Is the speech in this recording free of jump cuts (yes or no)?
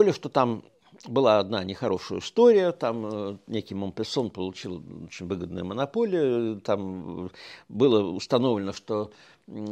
yes